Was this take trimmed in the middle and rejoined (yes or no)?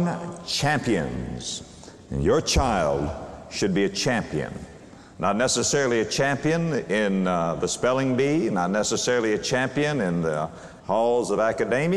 yes